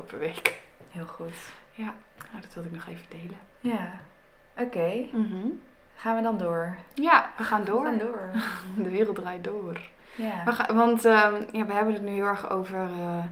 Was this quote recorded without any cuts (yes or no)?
yes